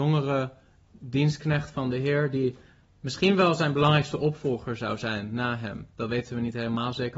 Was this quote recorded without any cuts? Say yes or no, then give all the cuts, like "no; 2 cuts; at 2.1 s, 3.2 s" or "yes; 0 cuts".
yes; 0 cuts